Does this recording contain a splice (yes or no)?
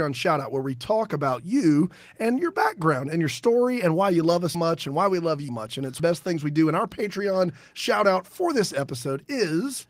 yes